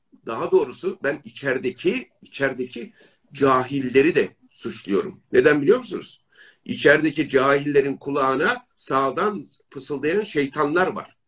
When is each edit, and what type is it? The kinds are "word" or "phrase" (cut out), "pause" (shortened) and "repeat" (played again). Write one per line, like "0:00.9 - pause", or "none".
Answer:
0:08.7 - pause

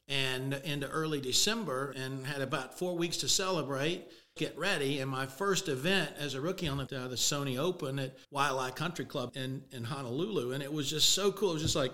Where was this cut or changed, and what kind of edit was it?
0:01.9 - word
0:04.4 - phrase
0:06.9 - phrase
0:08.2 - pause
0:09.3 - word

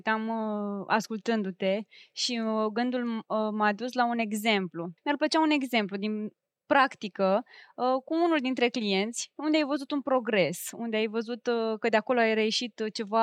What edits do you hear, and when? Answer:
0:05.0 - pause

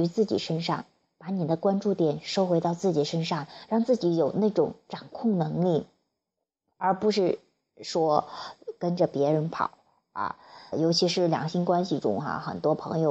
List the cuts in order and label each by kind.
0:10.7 - word

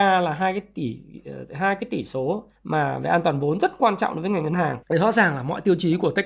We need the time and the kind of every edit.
0:02.6 - pause
0:04.8 - pause

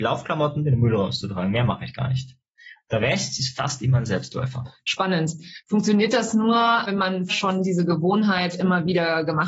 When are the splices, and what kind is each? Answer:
0:06.9 - word
0:07.3 - word

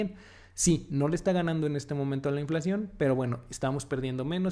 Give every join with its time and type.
none

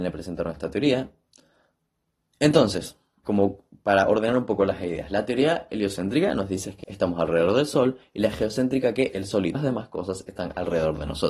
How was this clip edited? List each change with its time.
0:03.2 - word
0:06.8 - word
0:09.5 - word

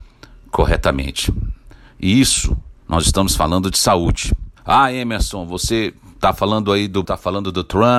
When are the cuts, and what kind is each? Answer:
0:02.8 - pause
0:04.6 - pause
0:07.0 - word

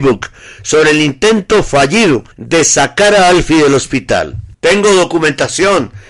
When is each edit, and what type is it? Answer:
0:02.3 - pause
0:04.5 - pause

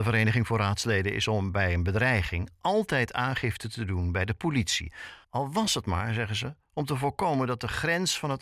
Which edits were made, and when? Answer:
0:05.2 - pause

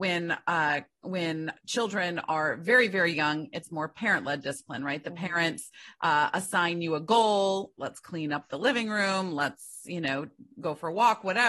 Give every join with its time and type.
0:01.6 - pause

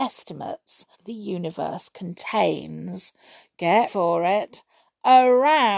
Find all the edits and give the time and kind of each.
0:00.9 - word
0:03.9 - word

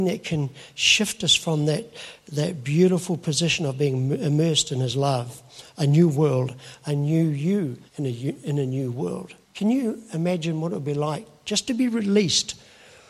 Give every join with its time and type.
0:07.9 - pause
0:09.4 - pause

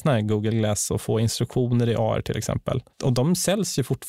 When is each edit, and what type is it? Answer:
0:02.9 - pause

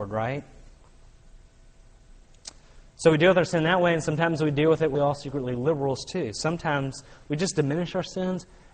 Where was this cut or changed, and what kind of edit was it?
0:04.9 - word

